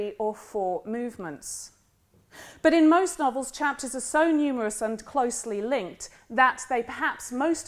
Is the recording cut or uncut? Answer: uncut